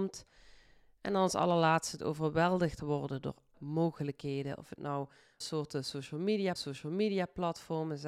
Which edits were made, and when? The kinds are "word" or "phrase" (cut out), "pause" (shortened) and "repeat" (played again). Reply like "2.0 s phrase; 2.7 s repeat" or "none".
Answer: 2.0 s phrase; 3.5 s word; 5.4 s word; 6.6 s repeat